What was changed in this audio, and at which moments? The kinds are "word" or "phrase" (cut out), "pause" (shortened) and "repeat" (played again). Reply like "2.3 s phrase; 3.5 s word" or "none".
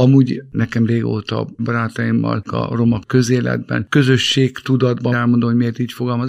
1.6 s word; 2.4 s word; 5.1 s word